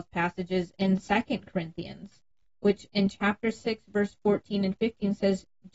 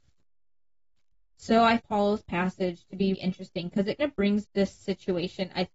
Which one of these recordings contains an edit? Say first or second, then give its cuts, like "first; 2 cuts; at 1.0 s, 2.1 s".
second; 4 cuts; at 1.8 s, 3.1 s, 4.0 s, 4.4 s